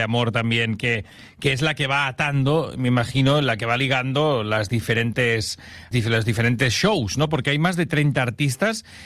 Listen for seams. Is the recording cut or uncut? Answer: cut